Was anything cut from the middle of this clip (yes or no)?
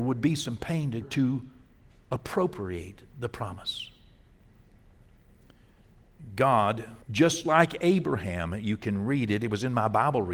yes